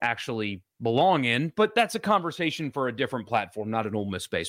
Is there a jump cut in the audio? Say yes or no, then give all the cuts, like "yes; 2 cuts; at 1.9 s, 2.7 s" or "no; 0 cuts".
no; 0 cuts